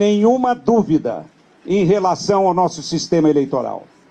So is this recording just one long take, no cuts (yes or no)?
yes